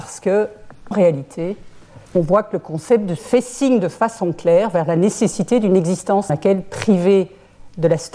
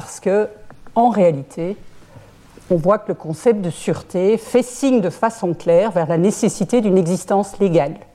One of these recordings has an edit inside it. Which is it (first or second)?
first